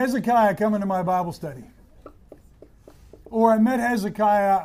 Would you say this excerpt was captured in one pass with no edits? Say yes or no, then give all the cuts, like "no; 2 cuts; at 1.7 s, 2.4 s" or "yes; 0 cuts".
no; 1 cut; at 3.2 s